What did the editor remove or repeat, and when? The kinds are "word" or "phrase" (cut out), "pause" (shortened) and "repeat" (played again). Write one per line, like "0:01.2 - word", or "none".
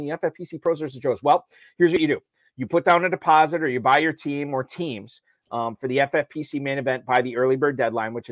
none